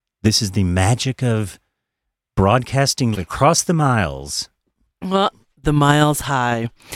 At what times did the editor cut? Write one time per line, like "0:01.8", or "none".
0:03.1